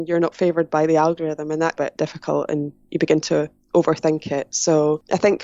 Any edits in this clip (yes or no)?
yes